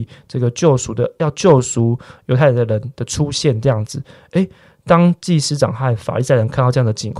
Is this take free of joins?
yes; 0 cuts

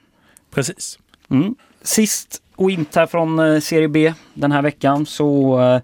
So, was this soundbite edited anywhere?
yes; 2 cuts; at 1.1 s, 2.9 s

